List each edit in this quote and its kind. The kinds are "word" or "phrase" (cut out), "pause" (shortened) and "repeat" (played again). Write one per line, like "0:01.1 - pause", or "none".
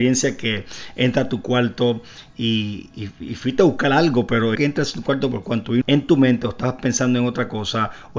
0:02.9 - word
0:04.6 - phrase
0:05.8 - phrase